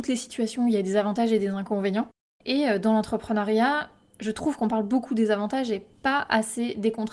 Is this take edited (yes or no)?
no